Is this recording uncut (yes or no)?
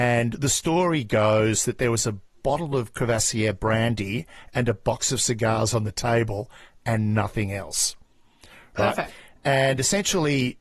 yes